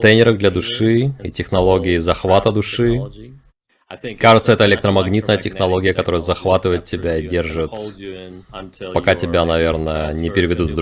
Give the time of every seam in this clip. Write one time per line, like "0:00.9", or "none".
none